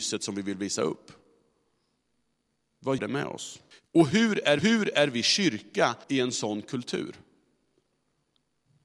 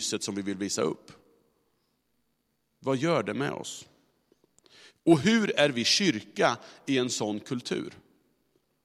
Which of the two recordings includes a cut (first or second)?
first